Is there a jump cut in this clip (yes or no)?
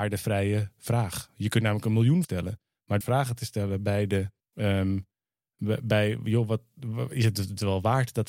yes